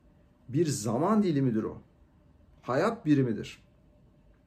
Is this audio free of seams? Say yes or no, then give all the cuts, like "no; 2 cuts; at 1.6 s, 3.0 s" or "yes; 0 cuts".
yes; 0 cuts